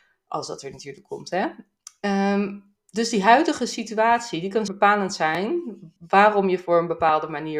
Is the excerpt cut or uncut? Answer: cut